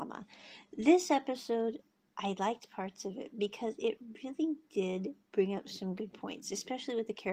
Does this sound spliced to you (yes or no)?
no